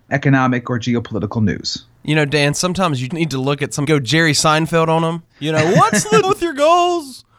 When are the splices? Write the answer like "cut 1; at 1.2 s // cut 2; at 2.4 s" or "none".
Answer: cut 1; at 3.1 s // cut 2; at 3.8 s // cut 3; at 5.3 s // cut 4; at 6.2 s

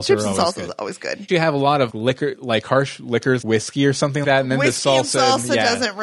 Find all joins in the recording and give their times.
cut 1; at 1.3 s // cut 2; at 1.9 s // cut 3; at 3.4 s // cut 4; at 4.2 s

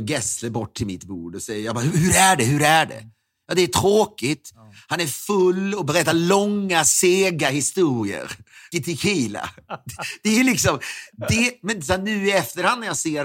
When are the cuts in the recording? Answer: cut 1; at 8.7 s

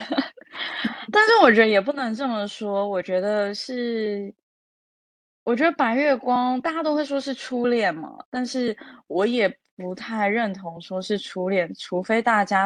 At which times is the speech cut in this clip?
none

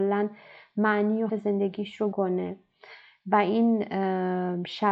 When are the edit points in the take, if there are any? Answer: cut 1; at 1.3 s // cut 2; at 2.1 s

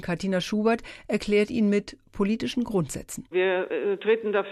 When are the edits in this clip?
none

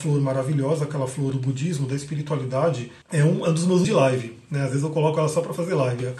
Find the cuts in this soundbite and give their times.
cut 1; at 1.3 s // cut 2; at 3.0 s // cut 3; at 3.8 s

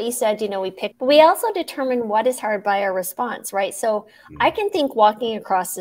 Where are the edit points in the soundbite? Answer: cut 1; at 0.9 s

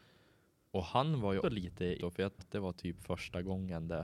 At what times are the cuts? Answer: cut 1; at 1.4 s // cut 2; at 2.0 s // cut 3; at 2.4 s

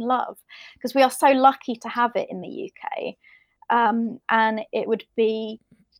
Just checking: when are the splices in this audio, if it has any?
none

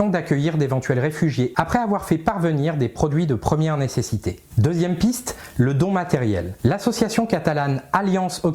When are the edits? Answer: cut 1; at 1.5 s

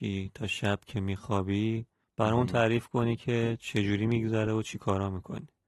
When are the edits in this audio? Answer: none

